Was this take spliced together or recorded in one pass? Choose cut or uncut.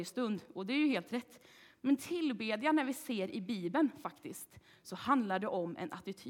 uncut